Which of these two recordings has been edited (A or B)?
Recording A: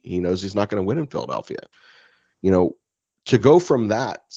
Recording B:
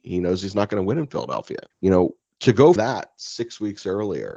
B